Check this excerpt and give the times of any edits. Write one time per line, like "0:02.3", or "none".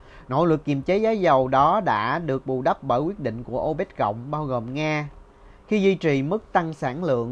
none